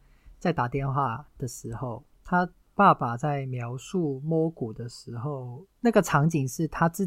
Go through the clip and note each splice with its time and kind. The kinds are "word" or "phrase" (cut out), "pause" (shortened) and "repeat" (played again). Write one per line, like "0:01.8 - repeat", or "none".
0:02.2 - pause